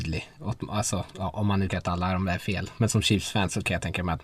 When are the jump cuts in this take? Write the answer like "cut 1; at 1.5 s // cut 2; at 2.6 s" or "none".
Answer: cut 1; at 1.7 s

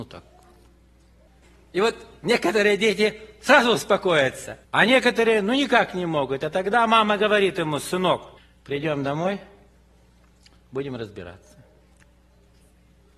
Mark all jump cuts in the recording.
cut 1; at 4.6 s // cut 2; at 8.4 s

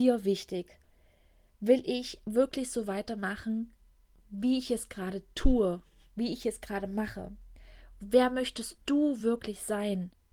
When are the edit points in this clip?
none

